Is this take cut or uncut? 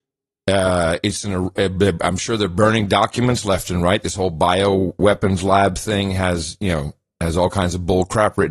uncut